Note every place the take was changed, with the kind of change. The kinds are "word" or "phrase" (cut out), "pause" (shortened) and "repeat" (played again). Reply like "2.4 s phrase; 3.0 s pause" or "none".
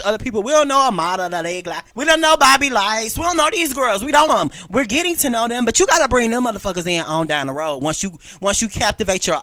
1.9 s pause; 4.3 s word